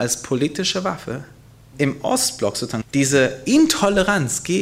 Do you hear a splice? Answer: yes; 2 cuts; at 1.7 s, 2.8 s

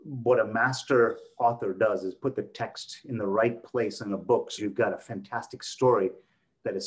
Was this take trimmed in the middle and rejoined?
yes; 1 cut; at 4.6 s

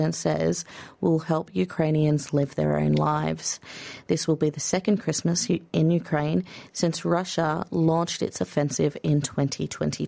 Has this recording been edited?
no; 0 cuts

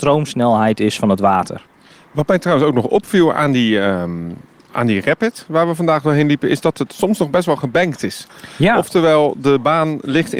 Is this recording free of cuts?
yes; 0 cuts

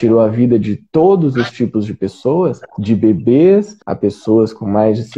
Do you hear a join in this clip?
yes; 2 cuts; at 2.7 s, 3.8 s

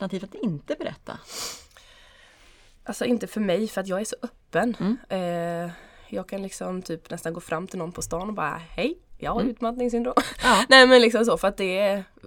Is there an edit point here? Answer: no; 0 cuts

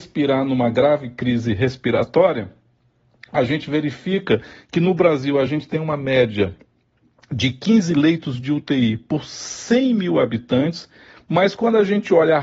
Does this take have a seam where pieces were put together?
no; 0 cuts

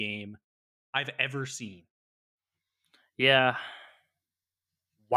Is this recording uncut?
yes; 0 cuts

